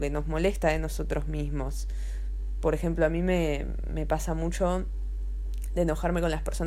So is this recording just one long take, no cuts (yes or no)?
yes